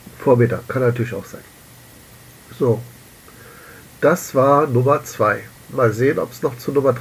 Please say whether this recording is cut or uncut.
uncut